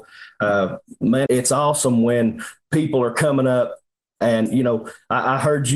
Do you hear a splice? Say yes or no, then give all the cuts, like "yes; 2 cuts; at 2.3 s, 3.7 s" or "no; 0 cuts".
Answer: yes; 1 cut; at 1.3 s